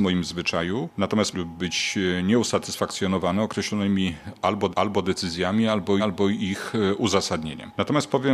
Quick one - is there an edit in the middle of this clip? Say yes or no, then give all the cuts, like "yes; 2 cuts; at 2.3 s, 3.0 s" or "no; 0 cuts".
yes; 3 cuts; at 1.3 s, 4.7 s, 6.0 s